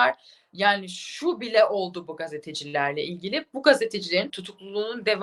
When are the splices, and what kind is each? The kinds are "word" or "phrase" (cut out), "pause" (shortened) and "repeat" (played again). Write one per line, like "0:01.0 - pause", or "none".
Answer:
0:04.3 - word